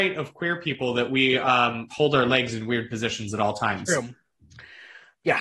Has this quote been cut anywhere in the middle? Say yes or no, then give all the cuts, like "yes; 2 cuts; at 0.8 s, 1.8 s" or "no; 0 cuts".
yes; 1 cut; at 1.9 s